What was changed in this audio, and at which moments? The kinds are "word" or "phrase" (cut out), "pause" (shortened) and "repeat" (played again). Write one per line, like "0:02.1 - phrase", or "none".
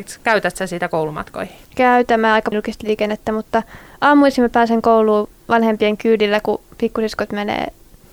0:01.6 - pause
0:02.5 - word